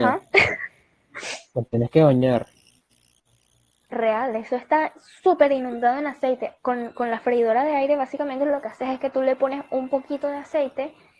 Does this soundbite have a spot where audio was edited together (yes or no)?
no